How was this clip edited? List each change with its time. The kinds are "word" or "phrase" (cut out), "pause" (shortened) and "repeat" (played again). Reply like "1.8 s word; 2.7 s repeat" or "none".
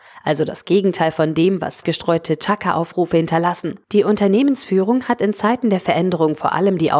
1.8 s phrase; 3.8 s pause